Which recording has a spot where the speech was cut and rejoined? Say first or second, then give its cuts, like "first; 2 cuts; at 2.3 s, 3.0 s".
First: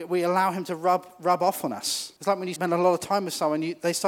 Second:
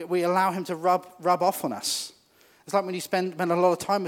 first; 2 cuts; at 2.2 s, 2.6 s